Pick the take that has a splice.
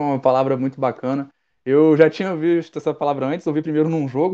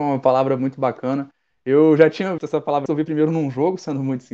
second; 2 cuts; at 2.4 s, 2.9 s

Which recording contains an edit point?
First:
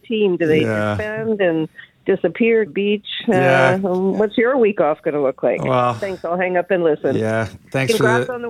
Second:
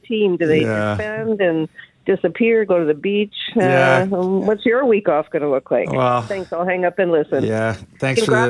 first; 1 cut; at 2.7 s

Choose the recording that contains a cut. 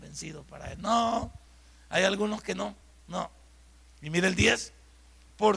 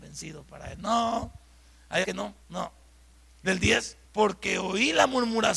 second; 4 cuts; at 2.0 s, 2.4 s, 3.4 s, 4.0 s

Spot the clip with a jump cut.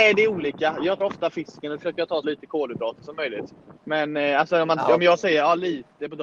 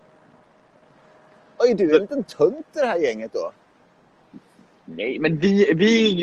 first; 3 cuts; at 1.0 s, 2.2 s, 3.8 s

